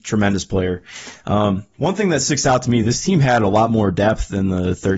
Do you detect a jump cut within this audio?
no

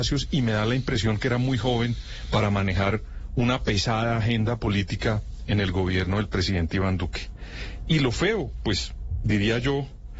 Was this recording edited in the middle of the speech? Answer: no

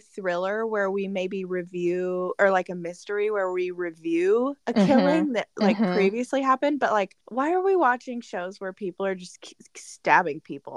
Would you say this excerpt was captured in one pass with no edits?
no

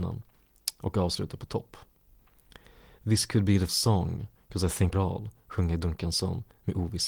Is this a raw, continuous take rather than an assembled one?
no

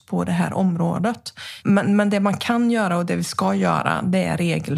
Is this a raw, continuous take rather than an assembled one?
yes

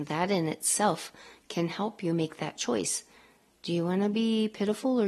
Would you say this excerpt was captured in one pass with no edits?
yes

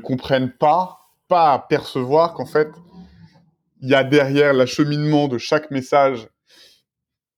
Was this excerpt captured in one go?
no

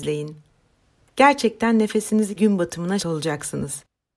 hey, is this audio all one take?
no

